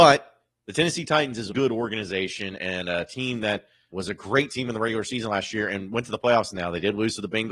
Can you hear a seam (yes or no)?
yes